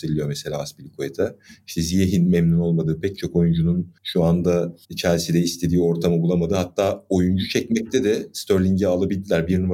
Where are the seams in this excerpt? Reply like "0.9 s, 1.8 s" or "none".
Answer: 4.0 s, 4.8 s